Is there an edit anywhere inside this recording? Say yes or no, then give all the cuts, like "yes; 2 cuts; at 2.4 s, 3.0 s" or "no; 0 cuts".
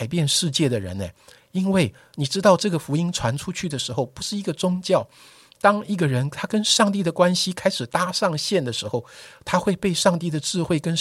no; 0 cuts